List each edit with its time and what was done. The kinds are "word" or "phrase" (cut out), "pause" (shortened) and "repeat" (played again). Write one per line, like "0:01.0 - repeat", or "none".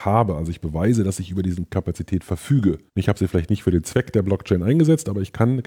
0:02.9 - pause